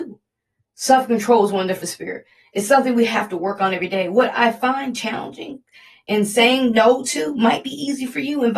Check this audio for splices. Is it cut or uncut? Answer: cut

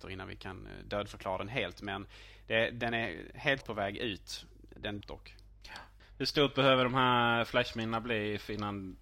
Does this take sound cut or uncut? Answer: cut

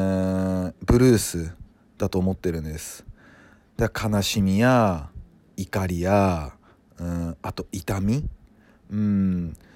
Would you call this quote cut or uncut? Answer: uncut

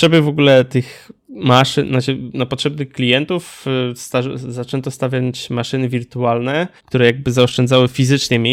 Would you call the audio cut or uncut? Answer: cut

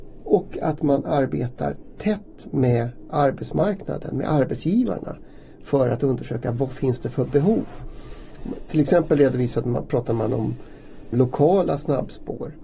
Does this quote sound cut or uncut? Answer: cut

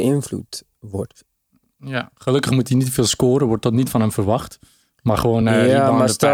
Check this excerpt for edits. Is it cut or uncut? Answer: uncut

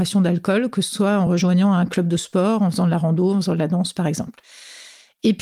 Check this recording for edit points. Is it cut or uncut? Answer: uncut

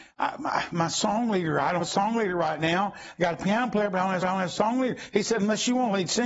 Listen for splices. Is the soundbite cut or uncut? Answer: cut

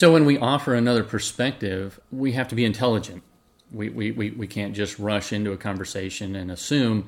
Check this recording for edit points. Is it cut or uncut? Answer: uncut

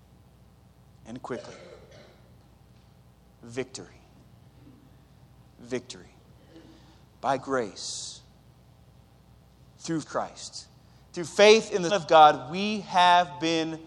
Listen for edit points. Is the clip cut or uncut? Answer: cut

